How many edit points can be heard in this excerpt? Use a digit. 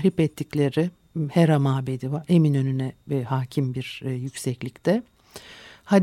0